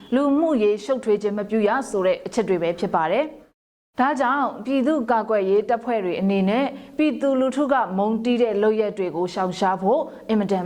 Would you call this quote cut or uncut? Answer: uncut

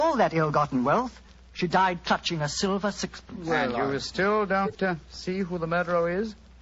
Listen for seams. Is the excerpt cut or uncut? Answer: uncut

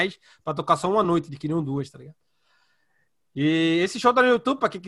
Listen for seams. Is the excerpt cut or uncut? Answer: uncut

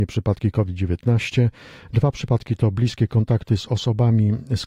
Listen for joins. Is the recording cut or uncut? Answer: uncut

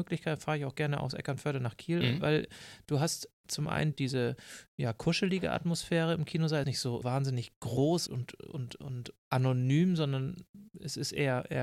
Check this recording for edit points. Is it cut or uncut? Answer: cut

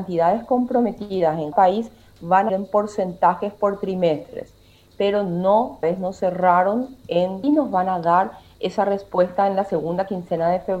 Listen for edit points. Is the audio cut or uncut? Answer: cut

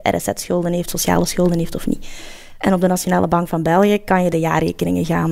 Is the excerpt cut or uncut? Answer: uncut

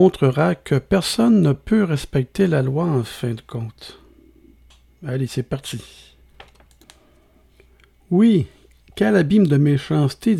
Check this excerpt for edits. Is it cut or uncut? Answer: uncut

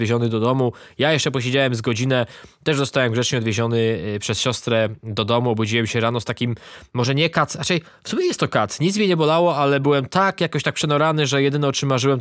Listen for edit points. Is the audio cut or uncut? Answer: uncut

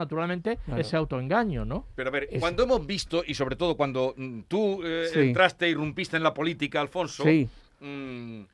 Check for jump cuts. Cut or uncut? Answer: uncut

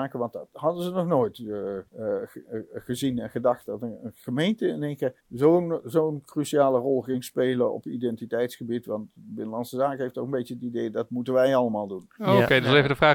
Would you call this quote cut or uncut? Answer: cut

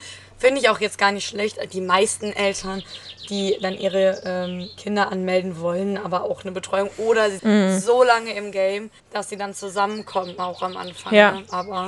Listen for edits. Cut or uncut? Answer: cut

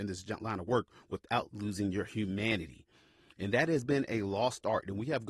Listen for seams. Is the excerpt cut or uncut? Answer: uncut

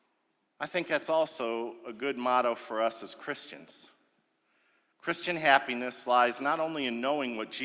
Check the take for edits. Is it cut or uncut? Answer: uncut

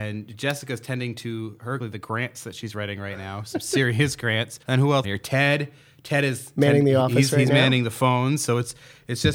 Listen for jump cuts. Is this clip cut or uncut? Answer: cut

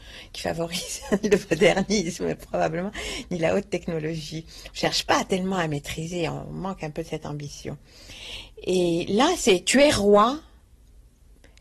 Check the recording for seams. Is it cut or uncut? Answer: uncut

